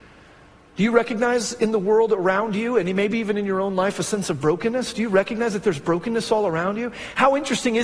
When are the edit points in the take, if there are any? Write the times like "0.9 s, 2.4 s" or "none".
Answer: none

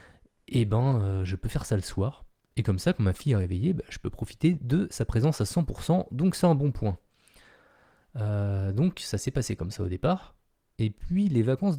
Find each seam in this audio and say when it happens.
none

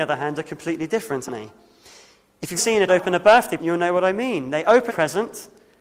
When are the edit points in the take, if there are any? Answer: 1.3 s, 2.6 s, 2.9 s, 3.6 s, 4.9 s

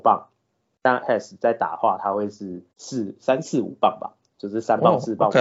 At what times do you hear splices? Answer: 1.0 s, 2.7 s

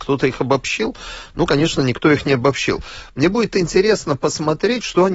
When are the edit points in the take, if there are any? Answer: none

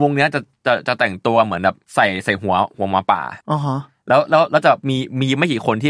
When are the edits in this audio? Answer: 1.8 s, 3.4 s

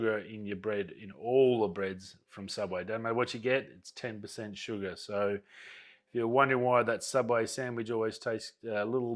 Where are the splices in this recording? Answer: none

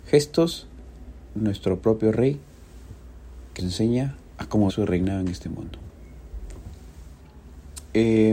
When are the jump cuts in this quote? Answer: 1.3 s, 3.6 s, 4.7 s

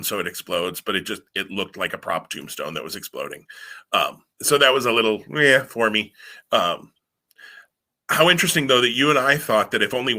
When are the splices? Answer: 4.3 s

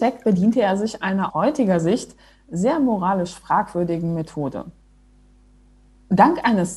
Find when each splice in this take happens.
1.3 s

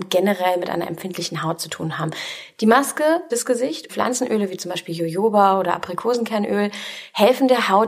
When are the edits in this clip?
3.3 s, 3.9 s

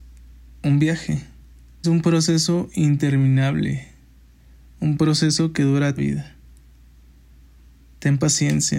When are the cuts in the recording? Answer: 1.8 s, 6.0 s

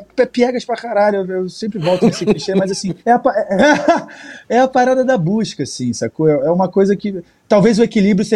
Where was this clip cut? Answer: 3.0 s

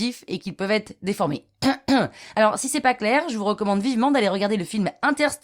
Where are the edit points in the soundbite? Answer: none

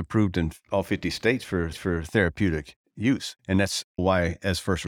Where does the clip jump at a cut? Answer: 1.7 s, 3.4 s, 4.0 s

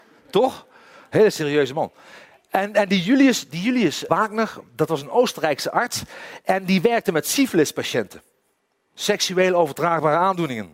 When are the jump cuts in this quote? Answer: 4.1 s

